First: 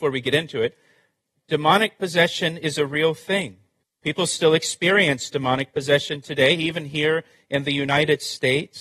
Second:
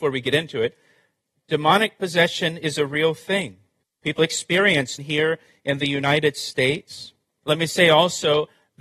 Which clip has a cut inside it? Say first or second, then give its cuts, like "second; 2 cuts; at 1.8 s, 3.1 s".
second; 2 cuts; at 4.2 s, 5.0 s